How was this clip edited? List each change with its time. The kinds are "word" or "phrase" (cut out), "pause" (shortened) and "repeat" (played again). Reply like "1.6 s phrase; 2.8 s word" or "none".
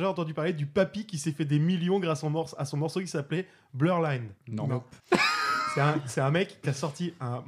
4.4 s pause; 5.0 s pause